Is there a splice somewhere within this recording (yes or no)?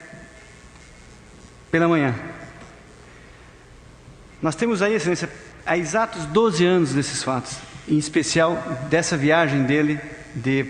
no